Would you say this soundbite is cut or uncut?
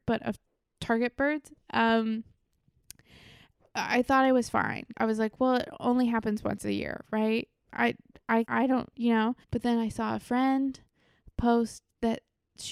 cut